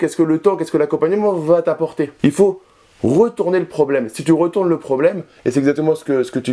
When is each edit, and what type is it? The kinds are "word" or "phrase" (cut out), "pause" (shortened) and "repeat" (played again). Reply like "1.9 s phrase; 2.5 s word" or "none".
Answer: none

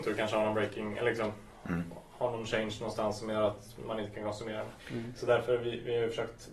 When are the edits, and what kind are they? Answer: 4.8 s pause

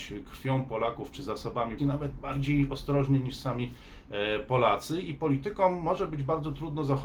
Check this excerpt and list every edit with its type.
1.8 s word

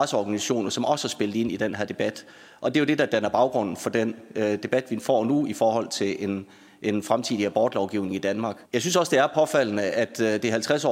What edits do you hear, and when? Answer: 8.6 s pause

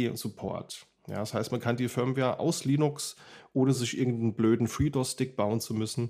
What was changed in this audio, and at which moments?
none

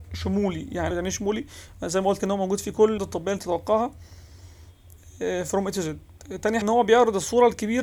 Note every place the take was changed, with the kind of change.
0.9 s word; 2.2 s word; 3.0 s word; 3.4 s word; 6.6 s word

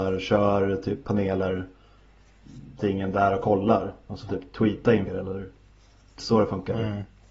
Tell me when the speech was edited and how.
2.8 s word; 4.3 s word; 5.1 s word; 6.2 s word

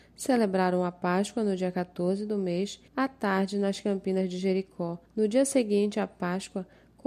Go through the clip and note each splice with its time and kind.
2.9 s pause; 5.1 s pause

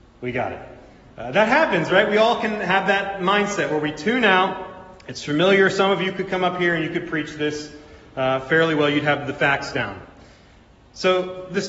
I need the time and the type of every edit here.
none

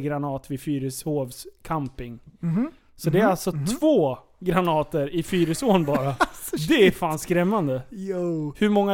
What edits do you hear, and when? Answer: none

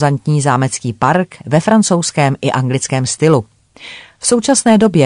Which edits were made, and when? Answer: none

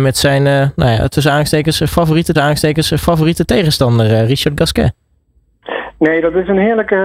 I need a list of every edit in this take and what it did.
2.3 s repeat

